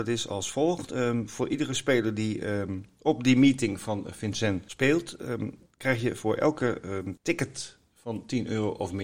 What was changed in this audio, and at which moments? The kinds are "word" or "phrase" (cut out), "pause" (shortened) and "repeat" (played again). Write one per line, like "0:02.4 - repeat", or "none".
0:07.2 - pause